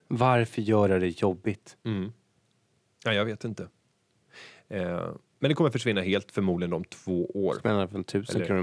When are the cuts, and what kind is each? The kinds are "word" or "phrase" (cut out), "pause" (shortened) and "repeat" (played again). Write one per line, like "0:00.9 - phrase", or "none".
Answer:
none